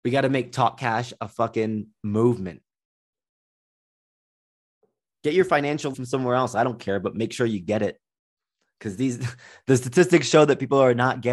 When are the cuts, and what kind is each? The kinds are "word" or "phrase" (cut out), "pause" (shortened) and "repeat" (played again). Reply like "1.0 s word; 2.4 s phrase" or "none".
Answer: 5.9 s word

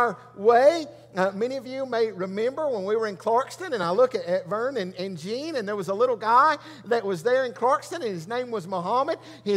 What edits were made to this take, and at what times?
none

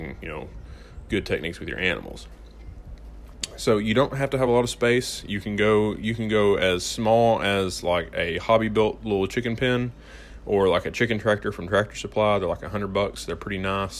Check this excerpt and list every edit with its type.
none

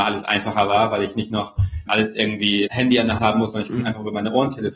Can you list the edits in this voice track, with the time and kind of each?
1.9 s word; 2.7 s word; 3.2 s word

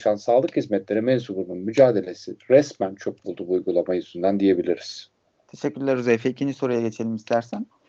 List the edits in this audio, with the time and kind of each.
none

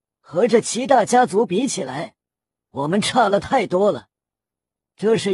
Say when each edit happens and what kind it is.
none

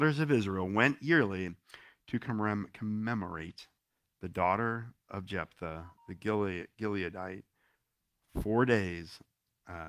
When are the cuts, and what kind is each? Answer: none

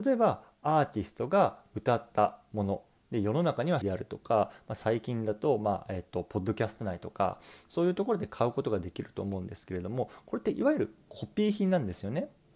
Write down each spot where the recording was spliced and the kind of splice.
3.8 s word

